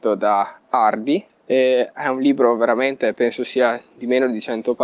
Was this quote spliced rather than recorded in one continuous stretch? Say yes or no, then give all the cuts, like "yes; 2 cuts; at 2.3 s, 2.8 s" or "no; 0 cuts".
yes; 1 cut; at 1.3 s